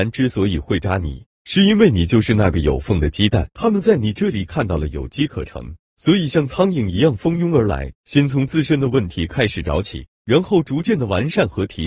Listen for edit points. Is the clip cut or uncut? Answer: cut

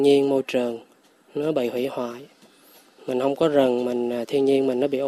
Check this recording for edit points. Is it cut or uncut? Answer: uncut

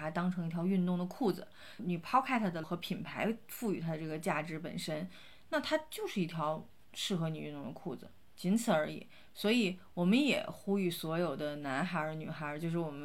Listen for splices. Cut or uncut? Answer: cut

